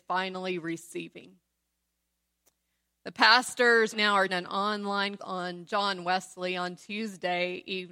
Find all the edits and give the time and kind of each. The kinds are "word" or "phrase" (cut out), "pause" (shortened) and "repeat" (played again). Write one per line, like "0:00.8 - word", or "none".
0:03.9 - word
0:04.3 - word
0:05.2 - word